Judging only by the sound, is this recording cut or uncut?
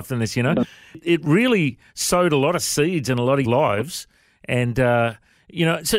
cut